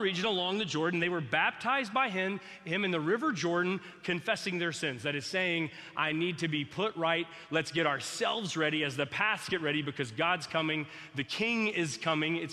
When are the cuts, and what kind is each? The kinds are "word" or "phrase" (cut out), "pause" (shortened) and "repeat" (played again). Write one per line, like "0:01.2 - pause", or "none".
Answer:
none